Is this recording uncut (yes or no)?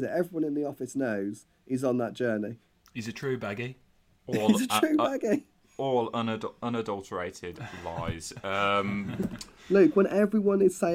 yes